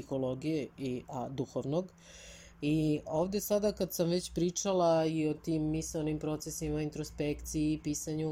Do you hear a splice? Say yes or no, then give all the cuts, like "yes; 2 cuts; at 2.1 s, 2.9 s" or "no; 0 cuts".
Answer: no; 0 cuts